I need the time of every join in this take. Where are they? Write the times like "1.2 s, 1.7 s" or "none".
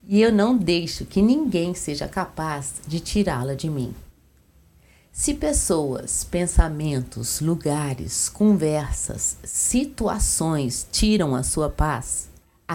none